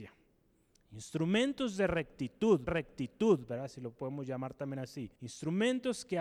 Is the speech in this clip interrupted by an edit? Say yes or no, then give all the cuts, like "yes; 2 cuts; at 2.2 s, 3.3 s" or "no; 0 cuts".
yes; 2 cuts; at 2.7 s, 5.2 s